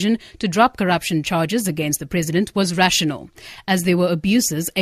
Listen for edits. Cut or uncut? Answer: uncut